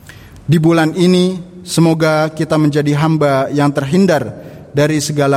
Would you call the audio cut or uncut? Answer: uncut